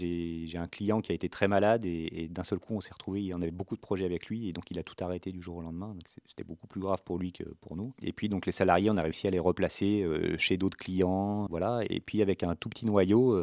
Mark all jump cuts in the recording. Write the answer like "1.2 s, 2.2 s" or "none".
11.5 s